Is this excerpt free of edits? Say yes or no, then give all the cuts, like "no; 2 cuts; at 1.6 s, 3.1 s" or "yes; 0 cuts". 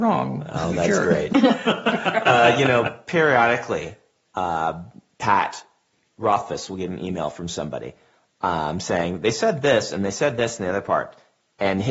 yes; 0 cuts